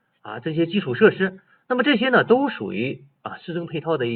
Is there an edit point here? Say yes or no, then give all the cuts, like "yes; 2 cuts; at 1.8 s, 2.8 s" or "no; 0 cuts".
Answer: no; 0 cuts